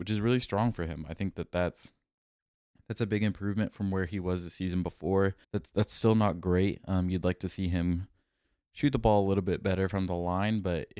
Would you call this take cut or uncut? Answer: cut